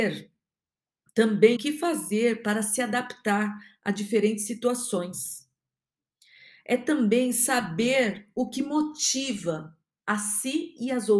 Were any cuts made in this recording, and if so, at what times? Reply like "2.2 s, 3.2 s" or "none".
1.6 s